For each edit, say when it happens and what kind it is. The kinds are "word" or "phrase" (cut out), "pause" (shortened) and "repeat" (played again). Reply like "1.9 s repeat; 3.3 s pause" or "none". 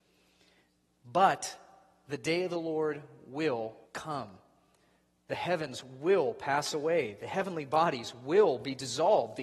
3.9 s pause